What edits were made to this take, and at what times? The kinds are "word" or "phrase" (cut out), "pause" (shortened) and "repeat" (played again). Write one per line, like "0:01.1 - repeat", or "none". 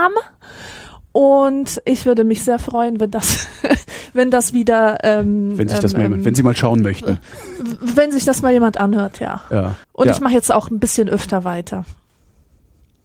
0:09.8 - pause